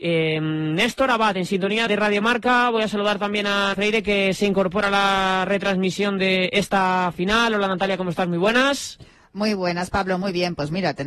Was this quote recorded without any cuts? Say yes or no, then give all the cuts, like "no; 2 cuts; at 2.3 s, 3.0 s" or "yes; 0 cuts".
no; 2 cuts; at 1.9 s, 3.7 s